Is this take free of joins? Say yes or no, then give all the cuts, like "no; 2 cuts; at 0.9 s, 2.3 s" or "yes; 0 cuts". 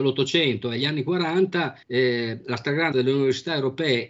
no; 2 cuts; at 1.8 s, 2.9 s